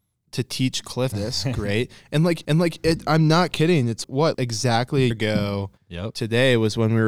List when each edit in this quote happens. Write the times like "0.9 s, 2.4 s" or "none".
1.1 s, 2.4 s, 4.0 s, 4.3 s, 5.1 s, 5.8 s

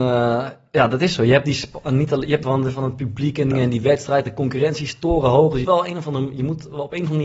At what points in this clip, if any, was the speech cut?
2.4 s, 3.5 s, 5.6 s

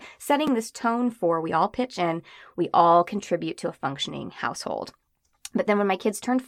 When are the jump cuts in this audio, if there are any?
none

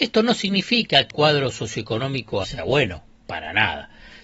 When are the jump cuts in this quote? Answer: 1.1 s, 2.4 s

